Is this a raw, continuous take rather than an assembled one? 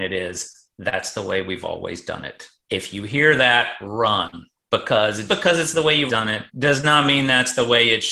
no; 4 cuts; at 2.6 s, 5.3 s, 6.1 s, 6.5 s

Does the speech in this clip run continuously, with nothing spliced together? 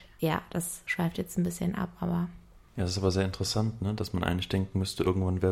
yes; 0 cuts

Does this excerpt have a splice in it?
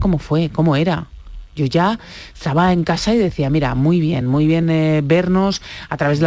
no; 0 cuts

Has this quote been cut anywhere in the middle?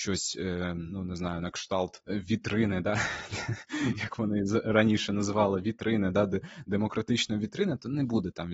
no; 0 cuts

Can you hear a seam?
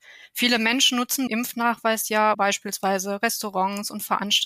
yes; 2 cuts; at 1.3 s, 2.3 s

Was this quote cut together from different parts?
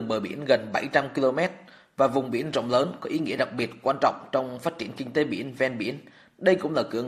no; 0 cuts

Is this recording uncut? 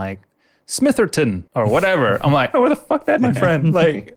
no; 3 cuts; at 1.5 s, 2.5 s, 3.2 s

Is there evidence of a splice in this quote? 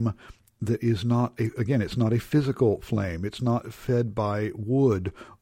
no; 0 cuts

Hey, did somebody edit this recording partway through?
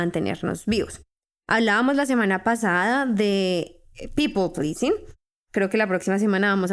no; 0 cuts

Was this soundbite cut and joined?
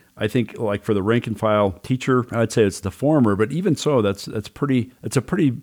no; 0 cuts

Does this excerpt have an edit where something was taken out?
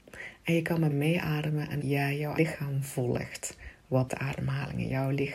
yes; 4 cuts; at 0.9 s, 1.8 s, 2.4 s, 4.1 s

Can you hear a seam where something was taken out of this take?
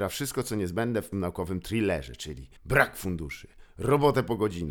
yes; 2 cuts; at 1.1 s, 2.6 s

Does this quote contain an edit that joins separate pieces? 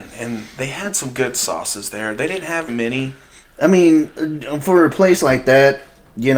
yes; 1 cut; at 2.7 s

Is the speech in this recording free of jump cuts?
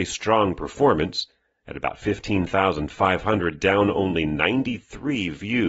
yes; 0 cuts

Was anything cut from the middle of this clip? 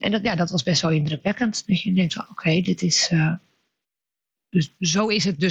no; 0 cuts

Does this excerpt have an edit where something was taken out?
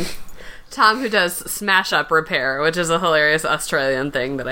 no; 0 cuts

